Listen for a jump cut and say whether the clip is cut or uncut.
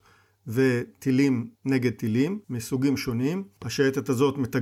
cut